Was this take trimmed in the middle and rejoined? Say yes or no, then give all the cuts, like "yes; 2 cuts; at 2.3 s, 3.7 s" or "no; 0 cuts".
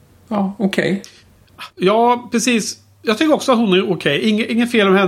yes; 1 cut; at 1.7 s